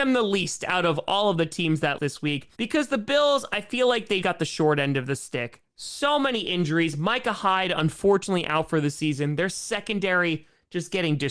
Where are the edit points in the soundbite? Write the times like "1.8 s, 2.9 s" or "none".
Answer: 2.0 s, 2.5 s, 4.2 s